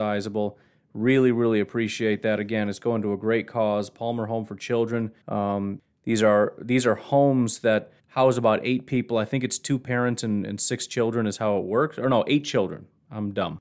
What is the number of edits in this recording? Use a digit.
2